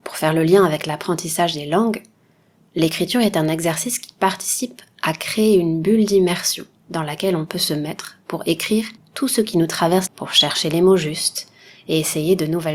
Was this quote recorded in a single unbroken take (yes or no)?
no